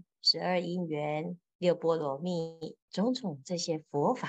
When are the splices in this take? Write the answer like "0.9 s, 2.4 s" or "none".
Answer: 2.8 s